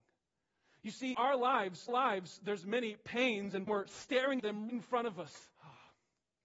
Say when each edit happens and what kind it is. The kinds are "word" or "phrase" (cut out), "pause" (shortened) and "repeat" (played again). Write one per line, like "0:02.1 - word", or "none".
0:01.1 - word
0:01.9 - repeat
0:03.7 - phrase
0:04.4 - word
0:04.7 - word
0:05.5 - pause

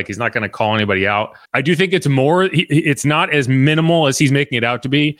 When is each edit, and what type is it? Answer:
0:01.4 - pause

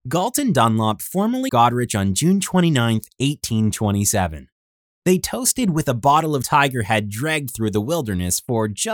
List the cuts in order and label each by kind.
0:01.5 - word
0:06.4 - word

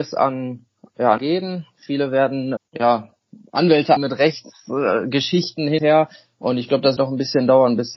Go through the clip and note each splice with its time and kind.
0:01.2 - word
0:02.6 - word
0:04.0 - word
0:05.8 - word
0:07.0 - word

